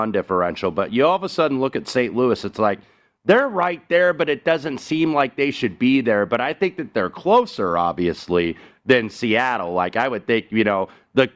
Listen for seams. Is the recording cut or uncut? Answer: uncut